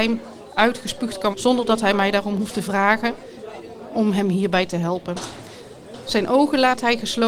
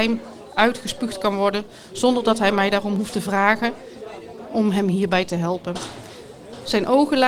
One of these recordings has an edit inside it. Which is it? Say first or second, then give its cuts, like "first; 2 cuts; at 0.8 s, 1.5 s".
first; 1 cut; at 1.3 s